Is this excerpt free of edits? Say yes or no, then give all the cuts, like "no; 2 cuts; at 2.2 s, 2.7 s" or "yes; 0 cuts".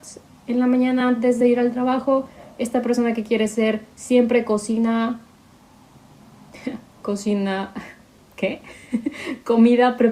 yes; 0 cuts